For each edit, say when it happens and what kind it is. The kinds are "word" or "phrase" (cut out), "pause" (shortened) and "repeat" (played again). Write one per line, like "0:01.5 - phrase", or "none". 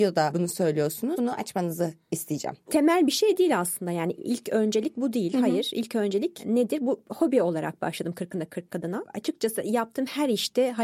none

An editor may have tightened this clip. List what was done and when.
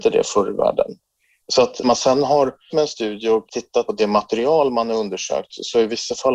0:01.8 - word
0:02.7 - word
0:03.5 - word
0:03.9 - word

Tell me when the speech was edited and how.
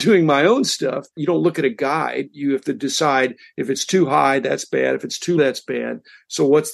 0:05.4 - word

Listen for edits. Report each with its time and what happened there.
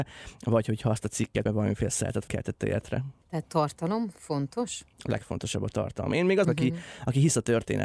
0:01.5 - word
0:02.3 - word
0:03.4 - phrase
0:06.4 - phrase

